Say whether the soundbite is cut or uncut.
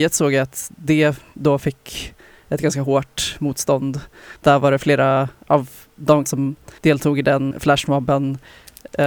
cut